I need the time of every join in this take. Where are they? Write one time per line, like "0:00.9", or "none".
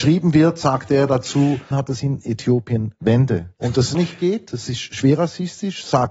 0:01.7
0:03.5
0:03.9